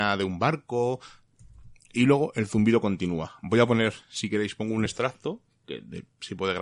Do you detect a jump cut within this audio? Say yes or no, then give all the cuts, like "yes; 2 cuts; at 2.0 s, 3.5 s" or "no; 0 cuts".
no; 0 cuts